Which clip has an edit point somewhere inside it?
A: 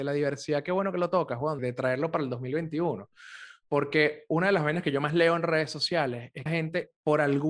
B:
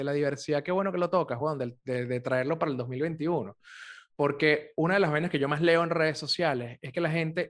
A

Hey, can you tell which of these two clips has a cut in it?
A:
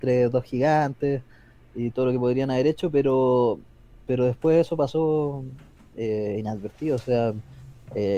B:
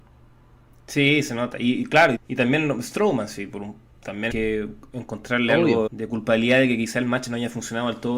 B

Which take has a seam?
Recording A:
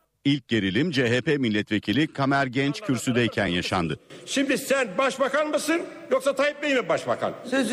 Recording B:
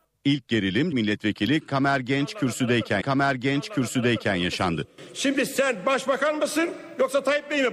B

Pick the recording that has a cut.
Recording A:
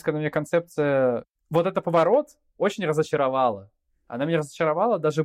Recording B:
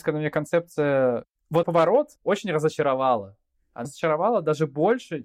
B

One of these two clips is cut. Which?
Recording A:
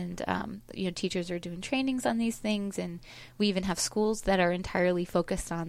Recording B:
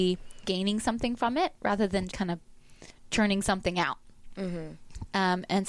B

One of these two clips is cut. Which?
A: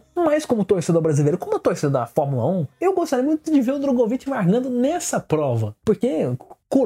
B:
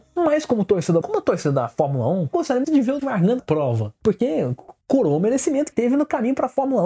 B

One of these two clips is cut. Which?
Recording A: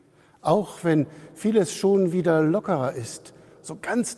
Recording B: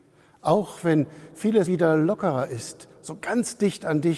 B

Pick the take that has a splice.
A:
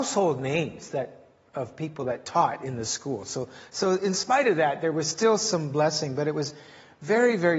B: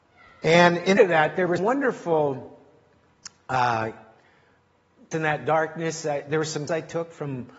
B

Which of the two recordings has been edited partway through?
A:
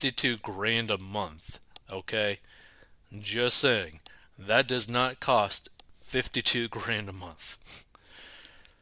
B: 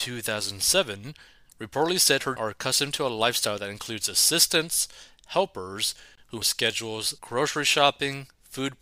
B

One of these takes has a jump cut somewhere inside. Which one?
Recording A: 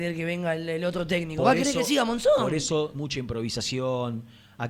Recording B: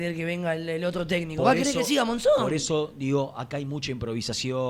A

